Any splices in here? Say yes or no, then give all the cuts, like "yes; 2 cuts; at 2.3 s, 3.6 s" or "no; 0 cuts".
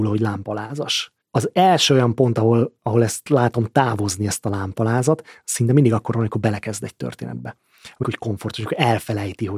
yes; 2 cuts; at 1.2 s, 8.0 s